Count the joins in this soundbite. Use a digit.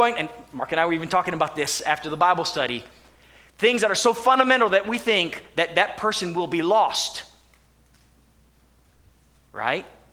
0